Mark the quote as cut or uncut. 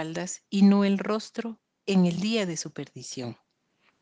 uncut